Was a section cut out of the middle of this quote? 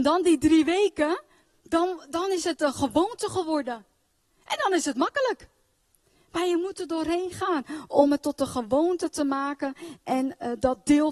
no; 0 cuts

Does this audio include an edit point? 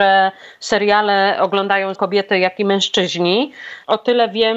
yes; 1 cut; at 1.9 s

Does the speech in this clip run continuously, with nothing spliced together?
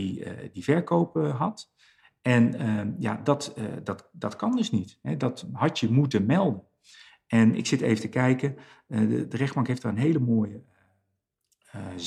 yes; 0 cuts

